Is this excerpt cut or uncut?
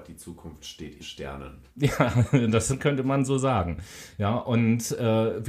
cut